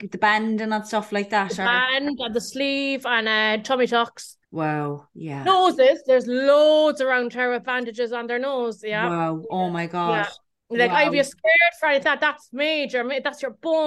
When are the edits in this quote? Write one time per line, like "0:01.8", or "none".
0:04.4
0:10.5
0:12.0